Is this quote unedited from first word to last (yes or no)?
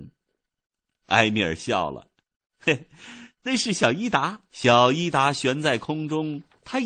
no